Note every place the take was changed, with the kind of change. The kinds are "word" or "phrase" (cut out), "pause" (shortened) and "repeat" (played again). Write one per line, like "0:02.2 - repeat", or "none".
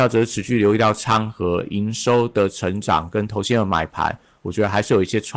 none